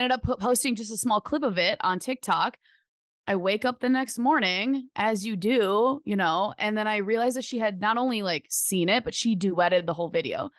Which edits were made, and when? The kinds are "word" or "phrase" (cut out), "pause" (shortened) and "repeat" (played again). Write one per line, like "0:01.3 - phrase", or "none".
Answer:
none